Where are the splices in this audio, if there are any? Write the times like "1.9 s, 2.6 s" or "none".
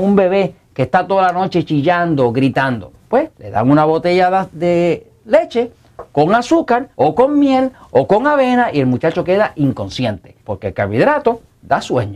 3.3 s, 6.9 s, 10.4 s